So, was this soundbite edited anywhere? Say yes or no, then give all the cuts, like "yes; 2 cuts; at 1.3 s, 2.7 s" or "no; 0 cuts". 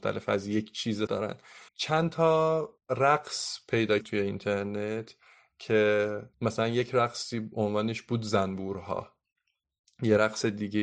yes; 5 cuts; at 1.1 s, 1.7 s, 2.8 s, 4.0 s, 6.3 s